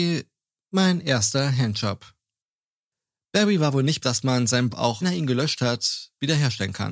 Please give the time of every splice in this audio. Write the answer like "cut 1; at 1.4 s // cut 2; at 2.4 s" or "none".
cut 1; at 4.0 s // cut 2; at 4.7 s // cut 3; at 5.0 s